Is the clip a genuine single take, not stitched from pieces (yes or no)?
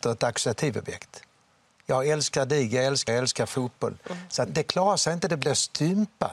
no